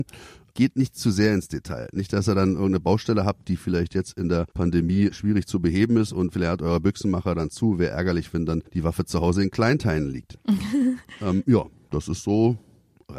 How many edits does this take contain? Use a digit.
2